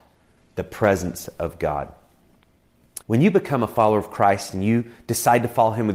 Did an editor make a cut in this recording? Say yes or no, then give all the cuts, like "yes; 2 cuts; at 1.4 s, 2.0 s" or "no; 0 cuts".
yes; 1 cut; at 3.0 s